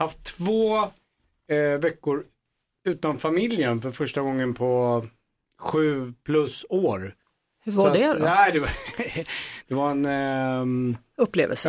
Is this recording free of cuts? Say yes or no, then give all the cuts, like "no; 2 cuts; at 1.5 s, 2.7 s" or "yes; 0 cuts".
yes; 0 cuts